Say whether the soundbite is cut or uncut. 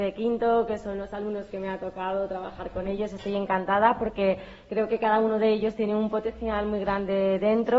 uncut